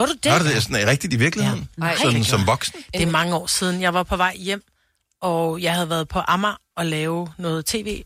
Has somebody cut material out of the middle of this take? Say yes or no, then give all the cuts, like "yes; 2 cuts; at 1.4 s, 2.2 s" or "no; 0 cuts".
no; 0 cuts